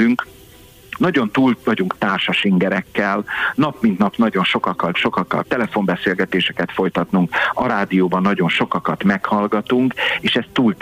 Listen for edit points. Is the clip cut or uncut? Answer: cut